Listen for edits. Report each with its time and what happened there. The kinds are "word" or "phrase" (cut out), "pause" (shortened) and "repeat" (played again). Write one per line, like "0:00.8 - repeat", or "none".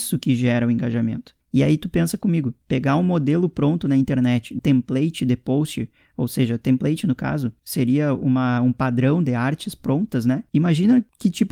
0:04.6 - word